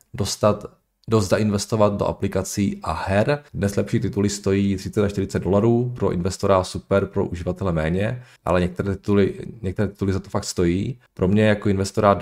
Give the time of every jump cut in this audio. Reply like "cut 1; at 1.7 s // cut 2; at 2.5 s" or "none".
cut 1; at 3.5 s // cut 2; at 8.4 s // cut 3; at 11.1 s